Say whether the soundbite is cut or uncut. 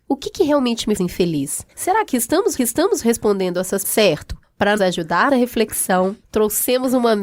cut